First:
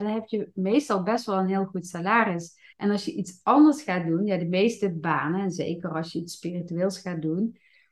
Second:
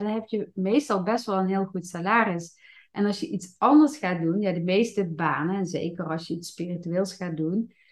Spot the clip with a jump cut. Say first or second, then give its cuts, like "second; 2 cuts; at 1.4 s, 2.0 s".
first; 1 cut; at 2.7 s